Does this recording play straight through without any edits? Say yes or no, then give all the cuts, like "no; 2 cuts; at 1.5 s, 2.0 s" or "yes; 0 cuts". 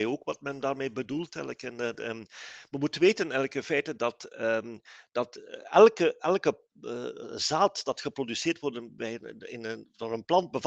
yes; 0 cuts